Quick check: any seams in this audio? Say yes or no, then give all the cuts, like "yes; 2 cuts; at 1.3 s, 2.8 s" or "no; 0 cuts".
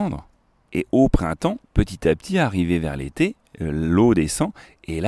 yes; 1 cut; at 1.6 s